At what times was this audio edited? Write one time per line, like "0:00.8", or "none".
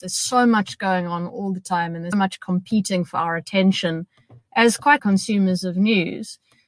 0:02.1
0:05.0